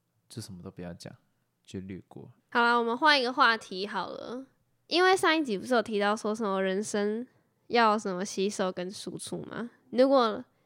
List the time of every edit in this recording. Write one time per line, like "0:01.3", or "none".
0:02.4